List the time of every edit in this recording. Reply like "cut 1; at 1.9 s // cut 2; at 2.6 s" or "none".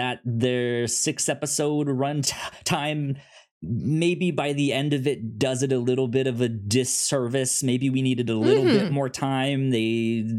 cut 1; at 2.2 s